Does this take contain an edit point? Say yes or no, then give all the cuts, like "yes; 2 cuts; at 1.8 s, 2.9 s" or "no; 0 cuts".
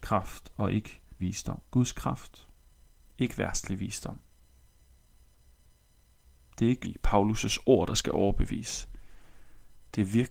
yes; 4 cuts; at 1.2 s, 1.7 s, 2.8 s, 6.8 s